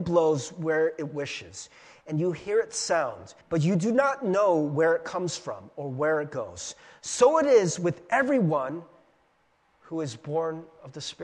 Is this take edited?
yes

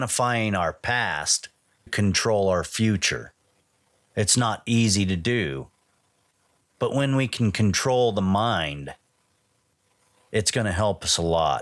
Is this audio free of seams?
no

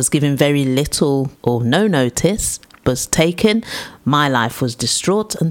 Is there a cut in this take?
yes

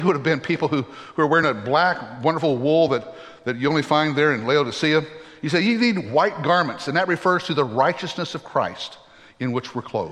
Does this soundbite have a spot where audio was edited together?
no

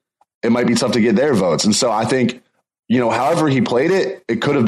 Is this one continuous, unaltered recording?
yes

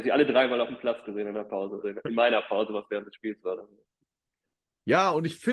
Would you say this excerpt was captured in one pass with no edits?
no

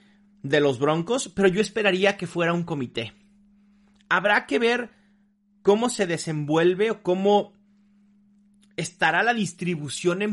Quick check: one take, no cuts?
yes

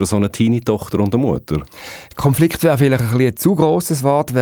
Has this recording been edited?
no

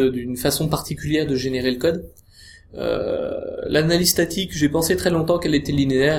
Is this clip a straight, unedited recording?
yes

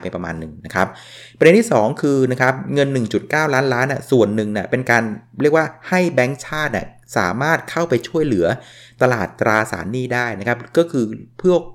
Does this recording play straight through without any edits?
yes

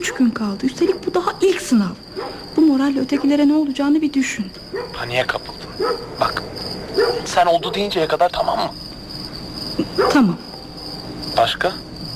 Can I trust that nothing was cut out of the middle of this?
no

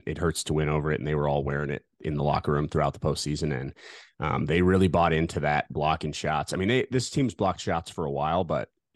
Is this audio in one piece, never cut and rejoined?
yes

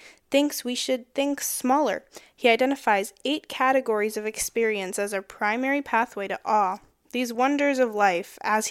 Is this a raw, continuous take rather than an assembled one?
yes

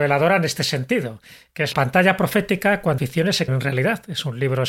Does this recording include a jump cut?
yes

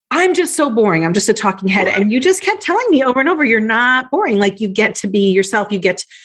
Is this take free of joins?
yes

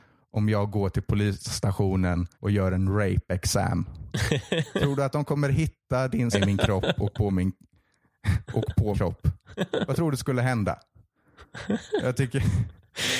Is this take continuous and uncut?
no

